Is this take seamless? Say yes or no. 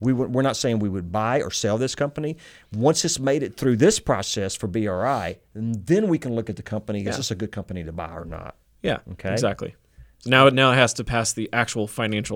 yes